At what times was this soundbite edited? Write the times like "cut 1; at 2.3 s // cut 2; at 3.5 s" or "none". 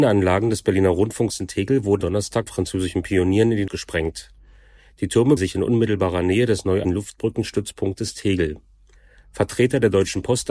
cut 1; at 2.0 s // cut 2; at 2.5 s // cut 3; at 3.7 s // cut 4; at 5.4 s // cut 5; at 6.8 s